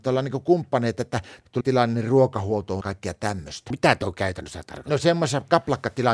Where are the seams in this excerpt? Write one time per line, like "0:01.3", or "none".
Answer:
0:01.6
0:02.8

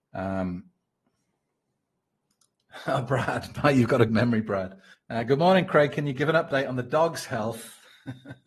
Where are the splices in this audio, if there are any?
0:04.1
0:04.9

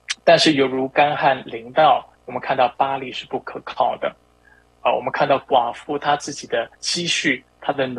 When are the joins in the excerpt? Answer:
0:02.2
0:06.7

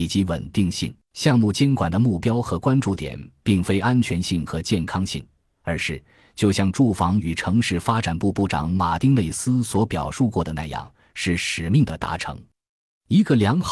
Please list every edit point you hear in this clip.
0:01.0

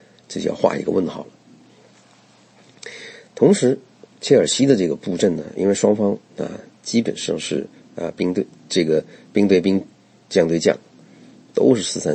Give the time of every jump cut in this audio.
none

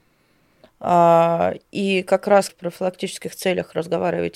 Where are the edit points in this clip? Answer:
0:02.5

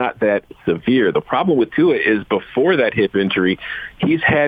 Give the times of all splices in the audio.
none

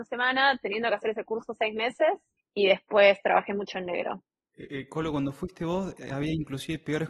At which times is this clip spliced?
0:02.4

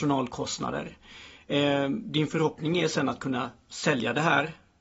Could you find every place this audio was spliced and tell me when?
none

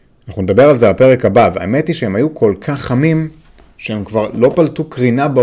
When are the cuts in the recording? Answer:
none

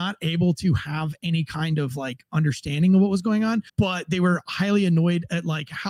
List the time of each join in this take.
0:03.7

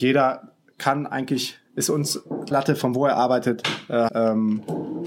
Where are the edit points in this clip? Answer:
0:01.7
0:02.5
0:04.1

